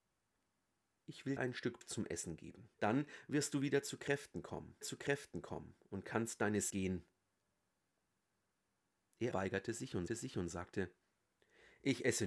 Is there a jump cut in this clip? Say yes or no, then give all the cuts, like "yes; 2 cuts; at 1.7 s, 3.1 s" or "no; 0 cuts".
yes; 7 cuts; at 1.4 s, 1.8 s, 2.7 s, 4.8 s, 6.7 s, 9.3 s, 10.1 s